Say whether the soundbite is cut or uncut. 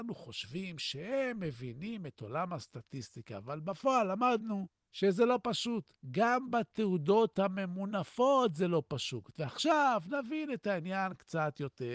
cut